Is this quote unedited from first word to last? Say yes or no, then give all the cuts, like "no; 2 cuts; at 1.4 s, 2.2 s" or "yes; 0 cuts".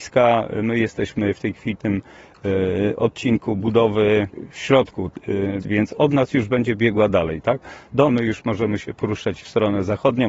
no; 3 cuts; at 1.8 s, 5.6 s, 8.1 s